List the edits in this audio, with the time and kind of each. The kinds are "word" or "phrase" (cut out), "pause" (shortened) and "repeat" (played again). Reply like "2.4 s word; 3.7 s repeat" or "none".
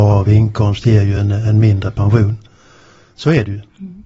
none